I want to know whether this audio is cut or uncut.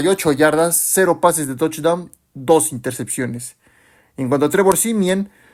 uncut